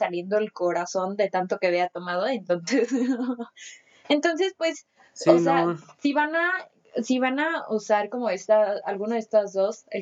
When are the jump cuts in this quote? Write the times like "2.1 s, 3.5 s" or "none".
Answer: none